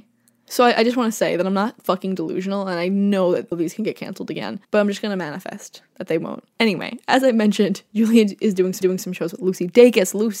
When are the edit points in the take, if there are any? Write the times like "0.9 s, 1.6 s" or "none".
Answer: 3.5 s, 4.6 s, 6.5 s, 8.8 s